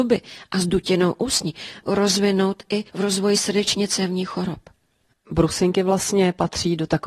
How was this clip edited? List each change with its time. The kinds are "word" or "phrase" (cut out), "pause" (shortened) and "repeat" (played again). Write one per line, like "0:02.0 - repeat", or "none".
0:01.8 - word
0:02.9 - phrase